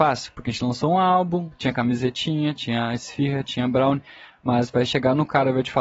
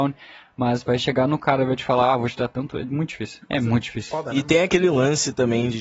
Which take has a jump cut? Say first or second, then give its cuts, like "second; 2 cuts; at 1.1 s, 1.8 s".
second; 1 cut; at 3.4 s